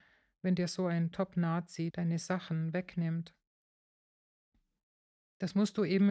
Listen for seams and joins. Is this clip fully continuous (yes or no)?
yes